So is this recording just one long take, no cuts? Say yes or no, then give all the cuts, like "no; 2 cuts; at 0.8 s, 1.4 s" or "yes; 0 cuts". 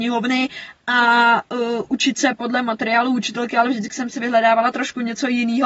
yes; 0 cuts